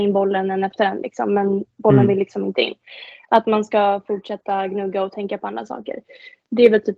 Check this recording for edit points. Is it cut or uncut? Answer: cut